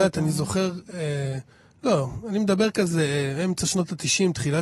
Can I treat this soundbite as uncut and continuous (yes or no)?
yes